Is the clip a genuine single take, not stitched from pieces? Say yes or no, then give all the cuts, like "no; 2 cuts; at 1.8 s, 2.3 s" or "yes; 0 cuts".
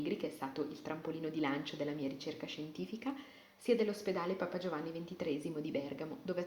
yes; 0 cuts